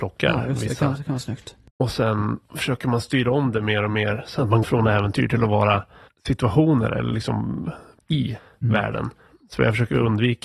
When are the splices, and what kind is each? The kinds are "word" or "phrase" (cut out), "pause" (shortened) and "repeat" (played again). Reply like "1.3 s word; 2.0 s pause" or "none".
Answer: 4.6 s word; 8.0 s word